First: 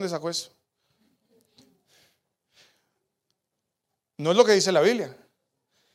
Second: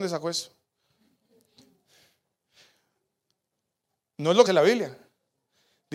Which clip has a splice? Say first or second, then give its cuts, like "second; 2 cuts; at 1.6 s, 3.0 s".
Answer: second; 1 cut; at 4.5 s